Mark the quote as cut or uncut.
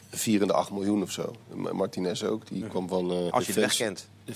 cut